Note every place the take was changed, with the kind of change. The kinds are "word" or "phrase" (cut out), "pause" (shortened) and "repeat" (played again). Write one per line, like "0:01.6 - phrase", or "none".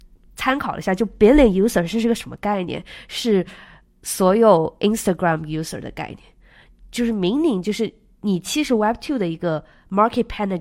none